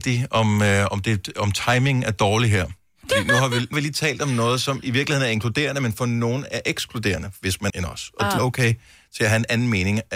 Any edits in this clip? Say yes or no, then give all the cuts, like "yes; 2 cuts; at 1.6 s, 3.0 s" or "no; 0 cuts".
yes; 3 cuts; at 3.7 s, 7.7 s, 8.4 s